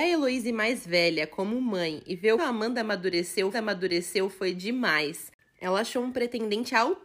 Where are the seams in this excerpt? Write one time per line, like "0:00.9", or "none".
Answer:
0:02.4
0:03.5